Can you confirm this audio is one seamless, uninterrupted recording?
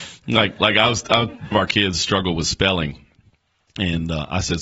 no; 1 cut; at 1.5 s

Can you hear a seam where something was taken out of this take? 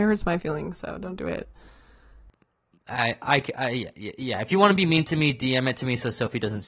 no; 0 cuts

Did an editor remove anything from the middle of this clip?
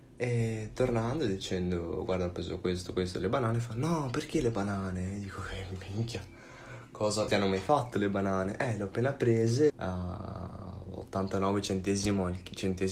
yes; 2 cuts; at 7.3 s, 9.7 s

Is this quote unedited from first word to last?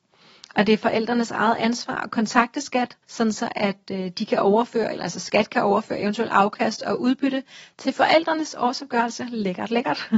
no; 2 cuts; at 3.0 s, 5.0 s

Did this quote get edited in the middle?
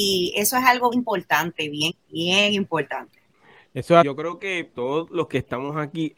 yes; 4 cuts; at 0.9 s, 1.9 s, 4.0 s, 4.7 s

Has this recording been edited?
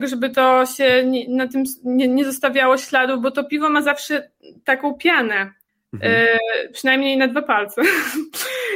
no; 0 cuts

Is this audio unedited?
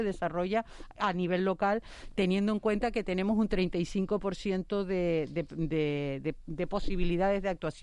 yes; 0 cuts

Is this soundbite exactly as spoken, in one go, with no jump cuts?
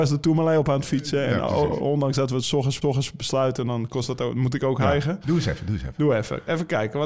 no; 1 cut; at 2.8 s

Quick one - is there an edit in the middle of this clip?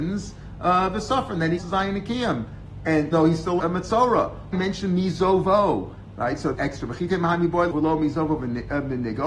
yes; 6 cuts; at 1.6 s, 3.1 s, 3.6 s, 4.5 s, 6.5 s, 7.7 s

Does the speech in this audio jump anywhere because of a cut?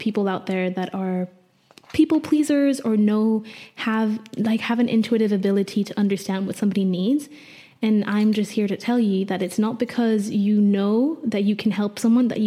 no; 0 cuts

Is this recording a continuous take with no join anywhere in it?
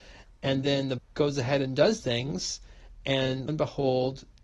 no; 3 cuts; at 1.0 s, 2.0 s, 3.5 s

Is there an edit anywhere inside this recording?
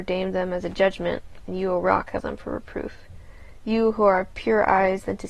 yes; 1 cut; at 2.2 s

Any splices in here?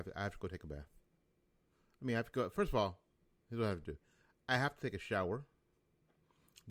no; 0 cuts

